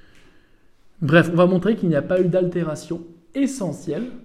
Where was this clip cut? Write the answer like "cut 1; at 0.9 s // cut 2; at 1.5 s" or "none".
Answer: none